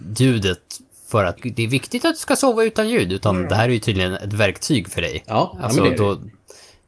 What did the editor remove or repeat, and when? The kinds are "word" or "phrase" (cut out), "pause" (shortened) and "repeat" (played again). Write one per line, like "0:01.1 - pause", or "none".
0:01.4 - word